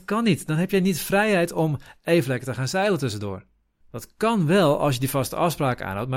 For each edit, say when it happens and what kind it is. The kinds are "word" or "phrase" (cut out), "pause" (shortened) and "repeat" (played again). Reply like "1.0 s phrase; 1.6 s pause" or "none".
3.8 s pause